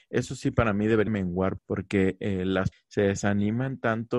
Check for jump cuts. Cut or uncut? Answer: cut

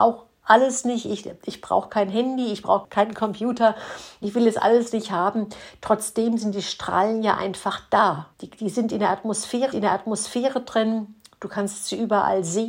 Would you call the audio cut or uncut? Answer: cut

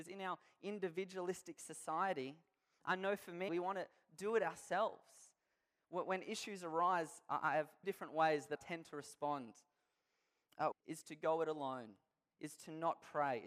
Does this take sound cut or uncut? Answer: cut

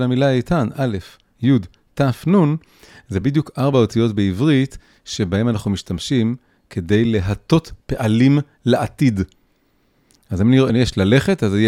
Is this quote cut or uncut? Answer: uncut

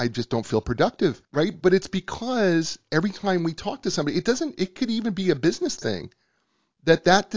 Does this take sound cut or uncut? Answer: cut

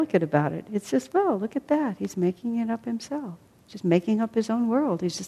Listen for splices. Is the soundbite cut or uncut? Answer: cut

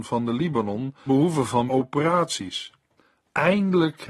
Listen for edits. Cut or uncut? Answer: cut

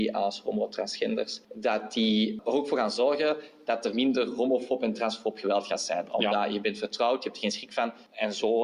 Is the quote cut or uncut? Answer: uncut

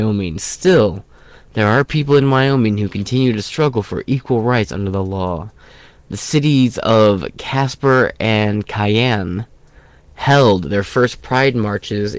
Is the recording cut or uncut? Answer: uncut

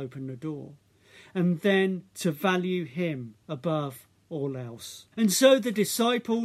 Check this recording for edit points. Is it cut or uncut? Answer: cut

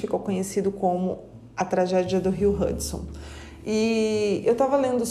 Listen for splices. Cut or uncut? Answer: uncut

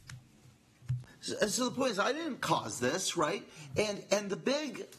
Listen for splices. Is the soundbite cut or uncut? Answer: uncut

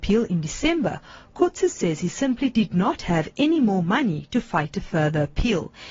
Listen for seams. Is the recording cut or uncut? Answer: uncut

